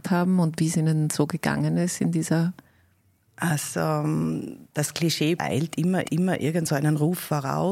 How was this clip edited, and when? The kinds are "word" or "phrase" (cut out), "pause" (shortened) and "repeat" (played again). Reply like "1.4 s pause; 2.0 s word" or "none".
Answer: 5.4 s phrase; 6.0 s repeat